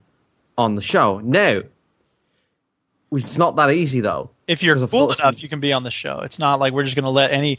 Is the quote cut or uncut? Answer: uncut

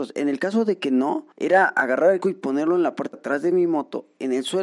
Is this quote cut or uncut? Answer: cut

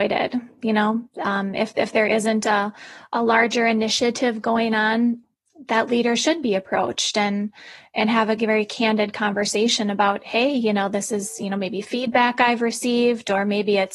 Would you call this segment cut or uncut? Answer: uncut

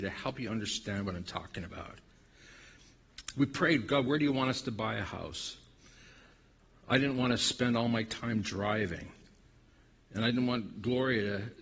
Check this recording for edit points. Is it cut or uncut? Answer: uncut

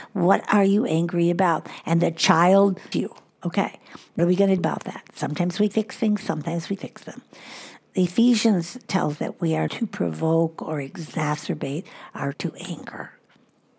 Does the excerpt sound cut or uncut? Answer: cut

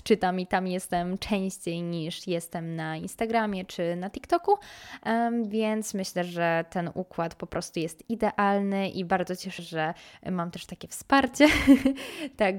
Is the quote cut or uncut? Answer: cut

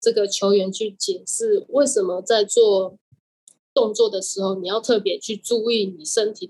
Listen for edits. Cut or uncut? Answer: uncut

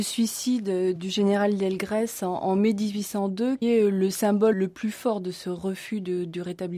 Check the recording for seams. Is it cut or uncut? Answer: cut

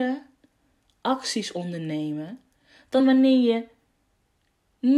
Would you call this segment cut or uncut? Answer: uncut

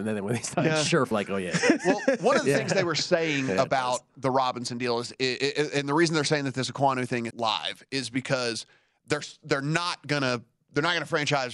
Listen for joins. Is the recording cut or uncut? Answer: cut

